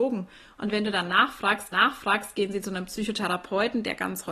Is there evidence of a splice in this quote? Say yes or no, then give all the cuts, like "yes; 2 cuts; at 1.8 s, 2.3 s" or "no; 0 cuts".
yes; 1 cut; at 1.7 s